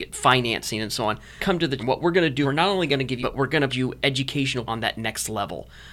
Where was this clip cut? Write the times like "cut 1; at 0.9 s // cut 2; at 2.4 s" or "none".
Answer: cut 1; at 1.4 s // cut 2; at 1.8 s // cut 3; at 2.4 s // cut 4; at 3.2 s // cut 5; at 3.7 s // cut 6; at 4.7 s

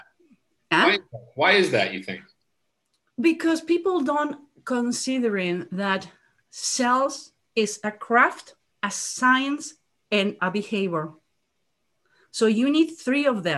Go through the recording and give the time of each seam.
cut 1; at 10.4 s

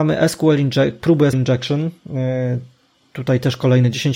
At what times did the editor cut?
cut 1; at 1.3 s

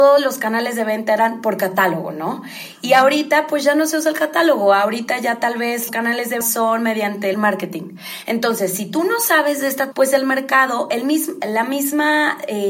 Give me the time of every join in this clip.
cut 1; at 5.9 s // cut 2; at 6.4 s // cut 3; at 7.3 s // cut 4; at 9.9 s

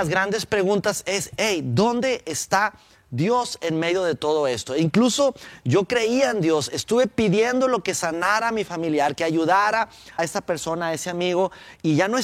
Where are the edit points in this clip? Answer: cut 1; at 10.2 s

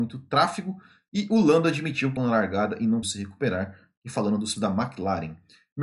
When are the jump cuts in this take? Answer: cut 1; at 2.2 s // cut 2; at 3.0 s // cut 3; at 4.6 s

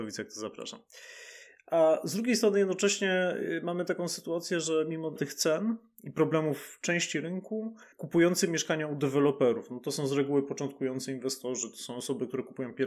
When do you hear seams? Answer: cut 1; at 5.2 s // cut 2; at 7.9 s

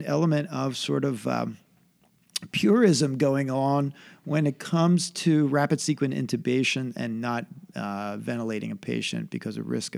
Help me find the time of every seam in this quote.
none

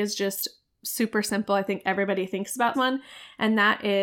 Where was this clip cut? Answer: cut 1; at 2.7 s

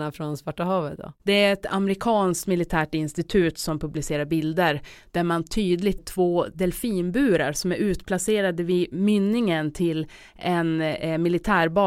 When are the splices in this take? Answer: cut 1; at 6.0 s

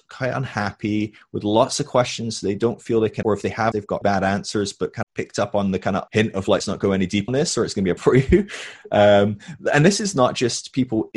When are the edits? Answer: cut 1; at 3.2 s // cut 2; at 3.7 s // cut 3; at 4.0 s // cut 4; at 5.0 s // cut 5; at 6.1 s // cut 6; at 6.6 s // cut 7; at 7.3 s // cut 8; at 8.0 s

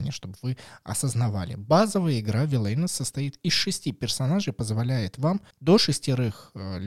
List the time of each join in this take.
cut 1; at 5.5 s

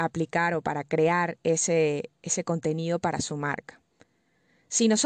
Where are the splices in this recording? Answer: none

